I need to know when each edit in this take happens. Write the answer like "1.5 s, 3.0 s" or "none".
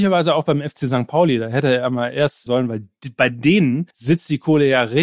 2.5 s, 3.9 s